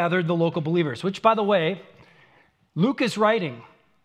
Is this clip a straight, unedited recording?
yes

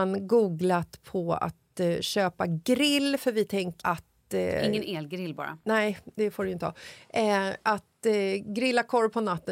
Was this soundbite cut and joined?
yes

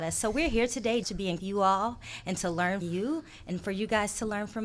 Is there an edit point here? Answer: yes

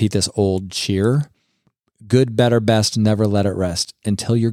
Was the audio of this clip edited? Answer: no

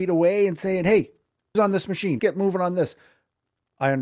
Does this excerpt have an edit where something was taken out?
yes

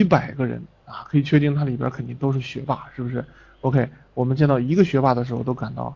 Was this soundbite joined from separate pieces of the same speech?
no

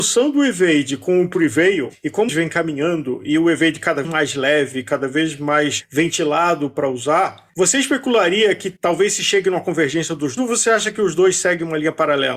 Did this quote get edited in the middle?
yes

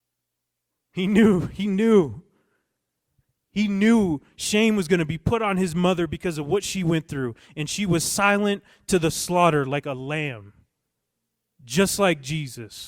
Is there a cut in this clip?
no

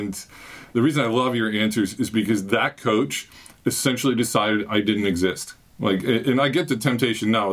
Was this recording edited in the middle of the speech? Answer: no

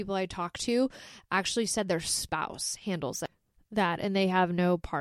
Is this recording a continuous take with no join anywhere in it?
yes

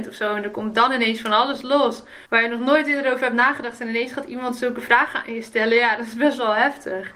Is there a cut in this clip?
yes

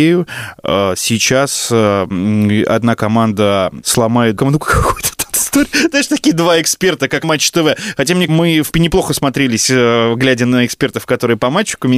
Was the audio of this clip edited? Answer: yes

